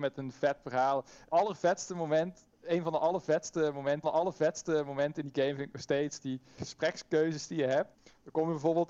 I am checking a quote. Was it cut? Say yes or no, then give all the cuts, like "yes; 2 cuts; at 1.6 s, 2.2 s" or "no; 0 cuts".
yes; 4 cuts; at 1.3 s, 4.0 s, 6.6 s, 7.9 s